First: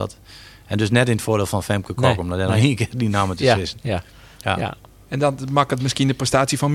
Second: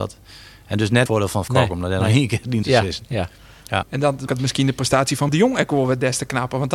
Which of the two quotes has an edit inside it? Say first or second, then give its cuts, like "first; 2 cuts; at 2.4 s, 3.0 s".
second; 6 cuts; at 1.1 s, 1.5 s, 2.6 s, 3.8 s, 4.3 s, 5.3 s